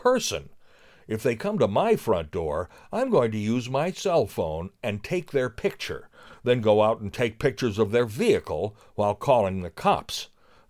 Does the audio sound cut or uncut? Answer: uncut